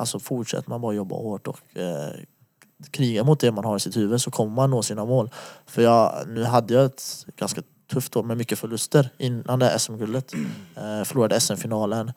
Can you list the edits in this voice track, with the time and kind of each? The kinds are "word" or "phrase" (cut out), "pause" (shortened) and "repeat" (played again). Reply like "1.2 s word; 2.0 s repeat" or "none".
none